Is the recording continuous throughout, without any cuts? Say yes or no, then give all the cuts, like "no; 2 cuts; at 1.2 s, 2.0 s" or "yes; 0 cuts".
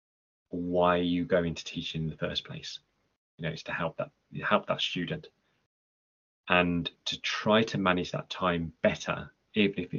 yes; 0 cuts